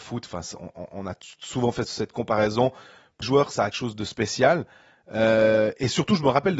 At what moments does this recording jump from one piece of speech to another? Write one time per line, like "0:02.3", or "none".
0:01.8
0:03.2
0:03.7